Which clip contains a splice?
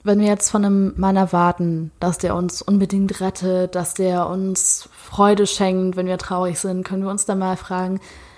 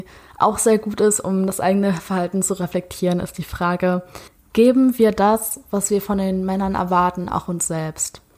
second; 1 cut; at 4.3 s

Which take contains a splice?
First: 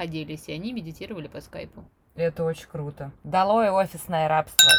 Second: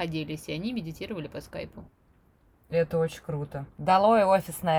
first; 1 cut; at 2.0 s

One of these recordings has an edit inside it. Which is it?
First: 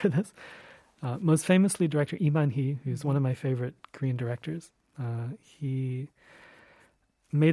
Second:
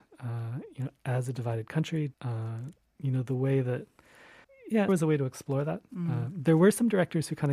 second; 3 cuts; at 2.1 s, 4.4 s, 4.9 s

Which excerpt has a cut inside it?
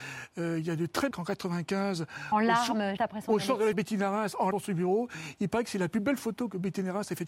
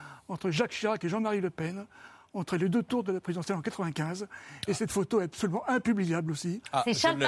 first; 4 cuts; at 1.1 s, 3.0 s, 3.7 s, 4.5 s

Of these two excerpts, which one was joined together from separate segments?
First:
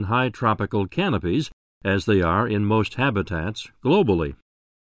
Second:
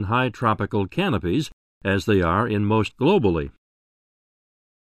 second; 1 cut; at 2.9 s

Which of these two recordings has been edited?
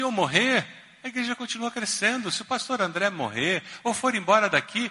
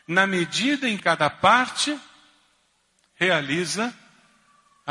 second; 1 cut; at 1.0 s

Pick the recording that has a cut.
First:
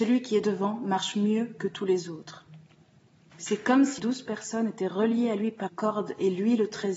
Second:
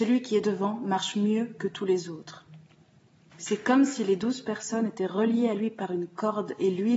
first; 2 cuts; at 4.0 s, 5.7 s

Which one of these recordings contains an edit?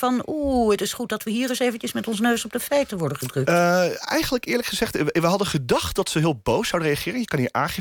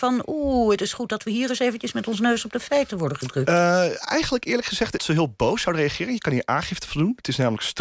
second; 1 cut; at 5.0 s

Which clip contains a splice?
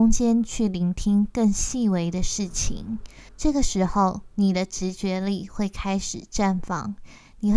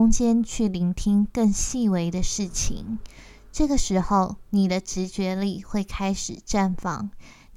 first; 1 cut; at 3.3 s

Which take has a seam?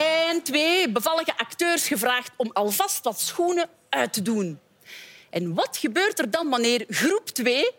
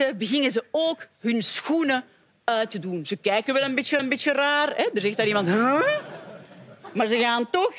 second; 1 cut; at 4.0 s

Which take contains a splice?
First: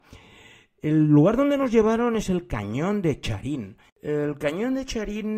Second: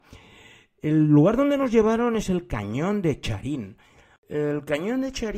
first; 1 cut; at 3.9 s

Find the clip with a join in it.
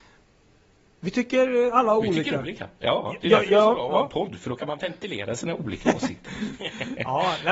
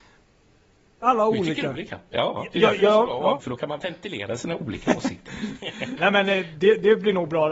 second; 3 cuts; at 1.0 s, 3.4 s, 6.0 s

